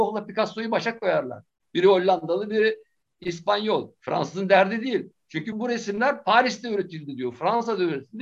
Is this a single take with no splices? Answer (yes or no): no